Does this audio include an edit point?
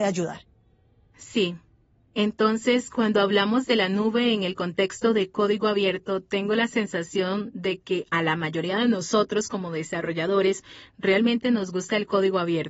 no; 0 cuts

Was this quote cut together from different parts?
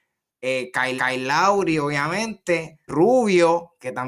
yes; 2 cuts; at 1.0 s, 2.9 s

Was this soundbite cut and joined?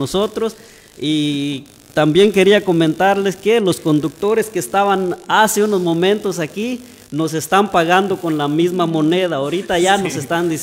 no; 0 cuts

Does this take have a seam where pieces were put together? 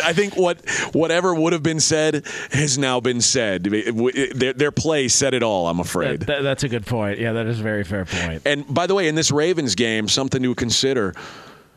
no; 0 cuts

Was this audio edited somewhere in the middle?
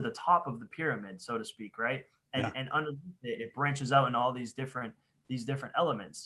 no; 0 cuts

